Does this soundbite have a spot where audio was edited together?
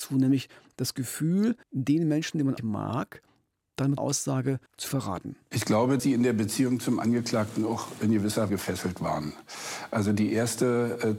yes; 6 cuts; at 1.6 s, 2.6 s, 4.0 s, 4.7 s, 6.0 s, 8.5 s

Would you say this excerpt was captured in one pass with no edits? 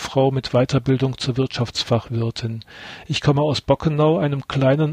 yes; 0 cuts

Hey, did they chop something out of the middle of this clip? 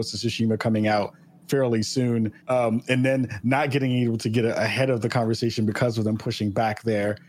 yes; 1 cut; at 2.4 s

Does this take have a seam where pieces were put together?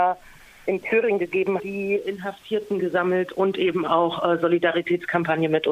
yes; 1 cut; at 1.6 s

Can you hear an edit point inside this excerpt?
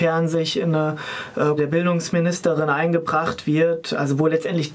yes; 1 cut; at 1.6 s

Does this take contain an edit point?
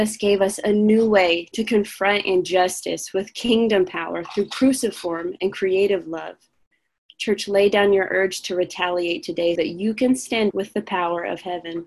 yes; 2 cuts; at 9.6 s, 10.5 s

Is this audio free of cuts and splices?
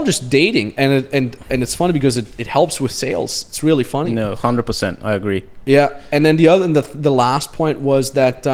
yes; 0 cuts

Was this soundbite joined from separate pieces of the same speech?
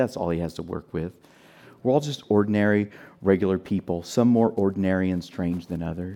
no; 0 cuts

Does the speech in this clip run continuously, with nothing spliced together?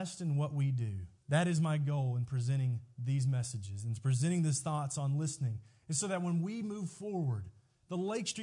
no; 1 cut; at 1.2 s

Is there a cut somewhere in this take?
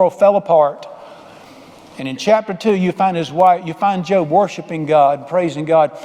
no; 0 cuts

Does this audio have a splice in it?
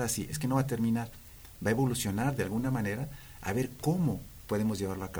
no; 0 cuts

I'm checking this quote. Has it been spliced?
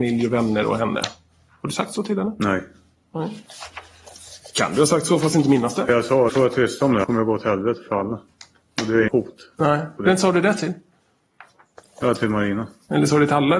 yes; 3 cuts; at 6.3 s, 7.0 s, 9.1 s

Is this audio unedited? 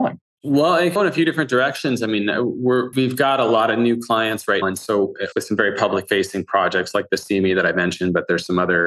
no; 5 cuts; at 1.0 s, 2.9 s, 4.6 s, 5.3 s, 7.1 s

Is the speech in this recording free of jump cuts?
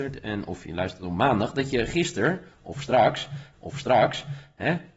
no; 1 cut; at 3.5 s

